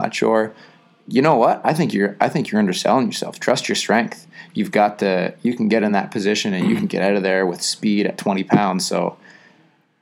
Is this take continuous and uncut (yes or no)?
yes